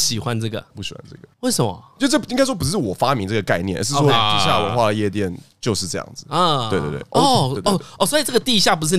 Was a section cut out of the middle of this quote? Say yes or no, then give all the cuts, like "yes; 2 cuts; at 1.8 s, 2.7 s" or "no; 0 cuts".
yes; 1 cut; at 1.3 s